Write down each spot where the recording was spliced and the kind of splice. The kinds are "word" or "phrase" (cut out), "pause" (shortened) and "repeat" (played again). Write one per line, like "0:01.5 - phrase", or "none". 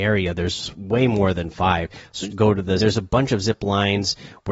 0:02.3 - word
0:02.8 - phrase